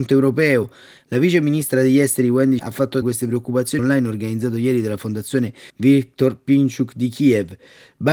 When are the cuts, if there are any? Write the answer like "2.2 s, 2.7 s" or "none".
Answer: 2.6 s, 3.0 s, 3.8 s, 5.7 s